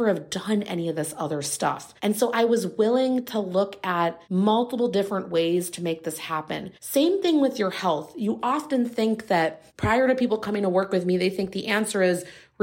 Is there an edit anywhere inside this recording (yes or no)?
yes